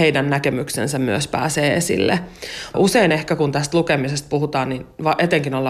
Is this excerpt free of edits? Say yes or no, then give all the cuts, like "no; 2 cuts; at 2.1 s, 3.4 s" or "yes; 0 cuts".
yes; 0 cuts